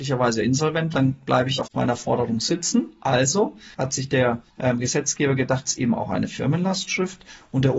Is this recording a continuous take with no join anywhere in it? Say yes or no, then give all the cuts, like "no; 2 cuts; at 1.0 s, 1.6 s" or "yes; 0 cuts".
no; 5 cuts; at 0.9 s, 1.6 s, 3.7 s, 4.5 s, 5.6 s